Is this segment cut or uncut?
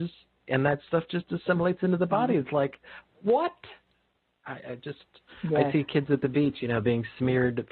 uncut